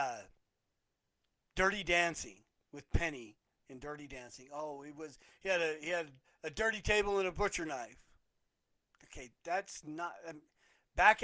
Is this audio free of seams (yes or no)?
no